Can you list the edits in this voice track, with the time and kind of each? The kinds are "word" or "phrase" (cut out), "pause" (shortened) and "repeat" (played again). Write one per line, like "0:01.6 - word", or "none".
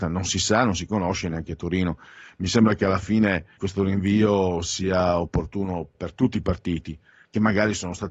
0:03.6 - word
0:05.9 - word

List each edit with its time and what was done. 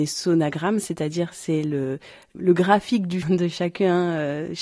0:03.2 - word

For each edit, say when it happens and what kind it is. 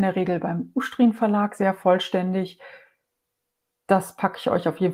none

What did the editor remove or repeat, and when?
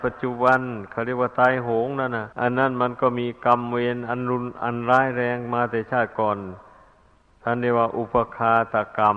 0:02.3 - pause

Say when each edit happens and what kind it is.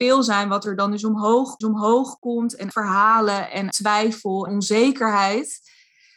0:01.6 - repeat
0:02.7 - word
0:03.7 - word
0:04.5 - phrase

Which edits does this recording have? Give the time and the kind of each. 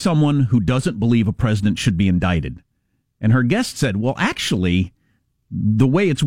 none

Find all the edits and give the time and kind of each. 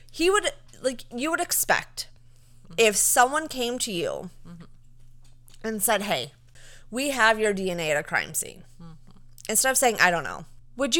none

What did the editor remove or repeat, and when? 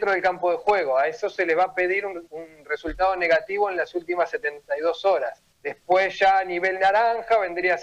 0:02.3 - pause
0:05.5 - pause

